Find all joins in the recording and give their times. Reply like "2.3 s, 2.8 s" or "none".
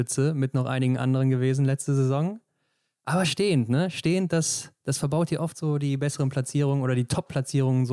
none